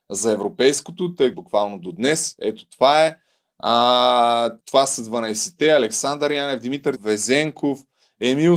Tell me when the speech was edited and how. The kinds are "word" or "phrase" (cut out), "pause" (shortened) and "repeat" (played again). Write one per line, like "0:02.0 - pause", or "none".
0:01.3 - phrase
0:04.6 - pause
0:07.0 - word